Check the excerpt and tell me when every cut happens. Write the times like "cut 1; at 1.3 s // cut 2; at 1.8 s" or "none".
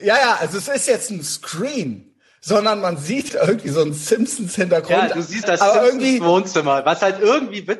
cut 1; at 1.1 s // cut 2; at 3.3 s // cut 3; at 5.4 s

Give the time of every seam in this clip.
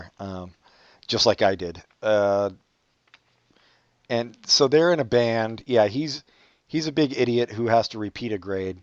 none

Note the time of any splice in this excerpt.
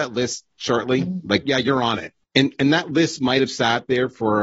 cut 1; at 1.4 s // cut 2; at 2.2 s

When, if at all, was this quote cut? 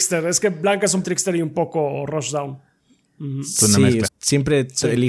cut 1; at 1.0 s // cut 2; at 4.1 s

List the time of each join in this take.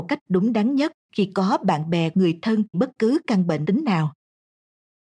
cut 1; at 1.0 s // cut 2; at 2.1 s // cut 3; at 2.7 s // cut 4; at 3.6 s

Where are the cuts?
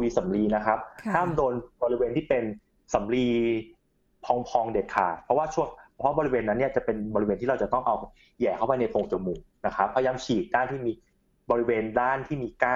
none

